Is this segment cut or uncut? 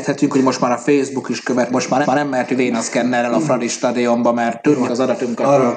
cut